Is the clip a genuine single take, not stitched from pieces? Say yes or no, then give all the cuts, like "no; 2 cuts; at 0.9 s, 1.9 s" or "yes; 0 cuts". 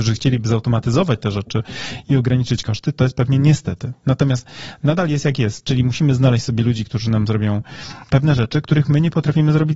yes; 0 cuts